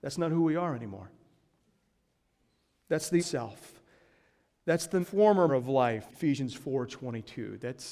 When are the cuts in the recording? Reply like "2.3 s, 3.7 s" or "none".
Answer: 3.2 s, 5.0 s, 5.5 s, 6.1 s